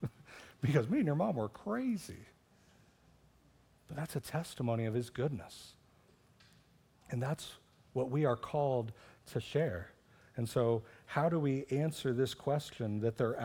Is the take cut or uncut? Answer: uncut